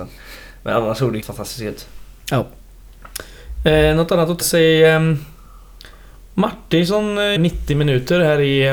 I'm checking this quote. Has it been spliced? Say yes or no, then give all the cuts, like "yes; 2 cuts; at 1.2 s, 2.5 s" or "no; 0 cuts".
yes; 3 cuts; at 1.2 s, 4.4 s, 7.4 s